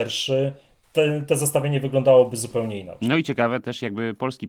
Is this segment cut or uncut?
uncut